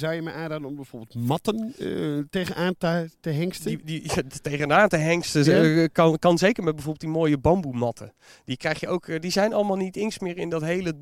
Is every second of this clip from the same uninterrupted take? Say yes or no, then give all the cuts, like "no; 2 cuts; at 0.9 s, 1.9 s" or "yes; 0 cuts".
yes; 0 cuts